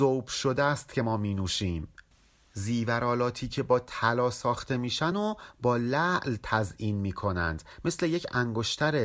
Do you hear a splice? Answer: no; 0 cuts

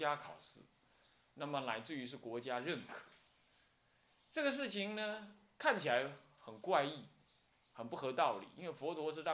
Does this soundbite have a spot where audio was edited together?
no; 0 cuts

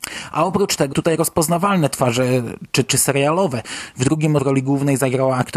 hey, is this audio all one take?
no; 3 cuts; at 0.9 s, 2.9 s, 4.4 s

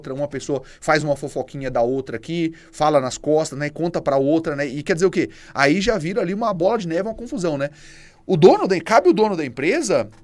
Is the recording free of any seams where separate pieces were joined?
yes; 0 cuts

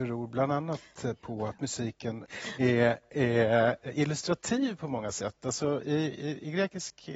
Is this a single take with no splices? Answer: yes; 0 cuts

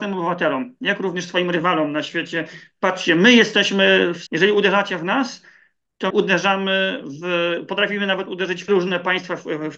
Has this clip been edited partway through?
yes; 3 cuts; at 4.3 s, 6.1 s, 8.7 s

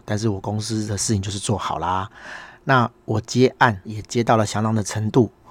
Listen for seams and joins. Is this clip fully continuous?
no; 1 cut; at 3.8 s

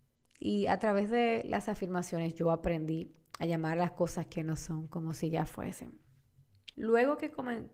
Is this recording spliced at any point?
yes; 1 cut; at 6.7 s

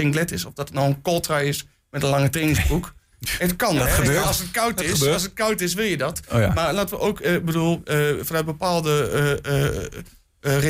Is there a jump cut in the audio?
no; 0 cuts

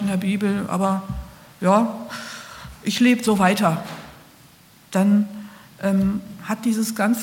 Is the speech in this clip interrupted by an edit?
no; 0 cuts

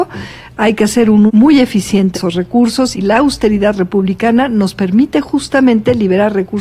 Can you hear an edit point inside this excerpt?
yes; 3 cuts; at 1.3 s, 2.1 s, 2.9 s

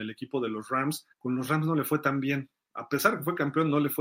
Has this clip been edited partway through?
yes; 1 cut; at 1.1 s

